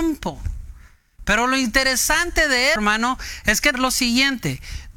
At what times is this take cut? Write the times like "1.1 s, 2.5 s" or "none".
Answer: 2.8 s, 3.7 s